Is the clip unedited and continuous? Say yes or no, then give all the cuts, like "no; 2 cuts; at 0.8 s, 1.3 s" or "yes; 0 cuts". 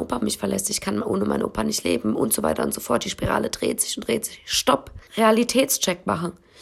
no; 1 cut; at 5.1 s